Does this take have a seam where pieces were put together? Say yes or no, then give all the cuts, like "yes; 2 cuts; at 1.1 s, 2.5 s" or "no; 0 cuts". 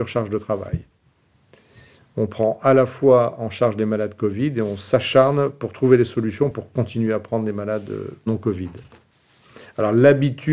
no; 0 cuts